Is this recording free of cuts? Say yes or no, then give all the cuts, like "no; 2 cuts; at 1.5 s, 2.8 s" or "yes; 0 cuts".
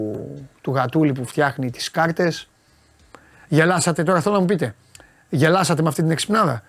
yes; 0 cuts